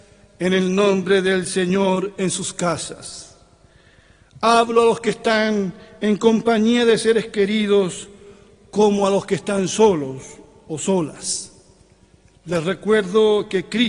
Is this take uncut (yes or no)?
yes